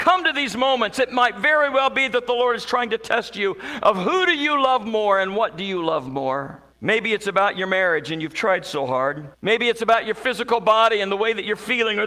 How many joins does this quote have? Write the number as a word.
two